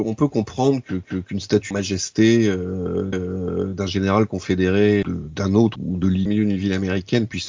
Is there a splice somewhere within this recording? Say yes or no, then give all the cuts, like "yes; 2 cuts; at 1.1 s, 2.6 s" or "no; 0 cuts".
yes; 6 cuts; at 1.0 s, 1.7 s, 3.1 s, 5.0 s, 5.8 s, 6.3 s